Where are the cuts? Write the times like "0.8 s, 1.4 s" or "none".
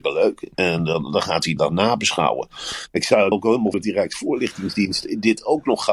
1.6 s, 3.3 s, 3.7 s